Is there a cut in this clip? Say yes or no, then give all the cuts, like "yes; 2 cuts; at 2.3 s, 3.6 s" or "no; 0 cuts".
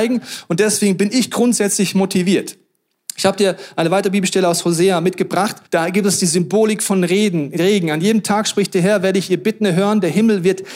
yes; 1 cut; at 5.7 s